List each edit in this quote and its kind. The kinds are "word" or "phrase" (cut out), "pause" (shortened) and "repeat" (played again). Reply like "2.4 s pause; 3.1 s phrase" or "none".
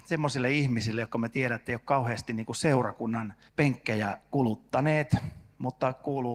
3.5 s pause